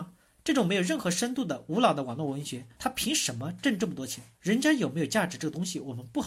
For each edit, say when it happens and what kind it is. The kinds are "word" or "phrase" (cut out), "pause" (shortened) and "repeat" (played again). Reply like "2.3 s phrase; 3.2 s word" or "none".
2.7 s pause; 4.3 s pause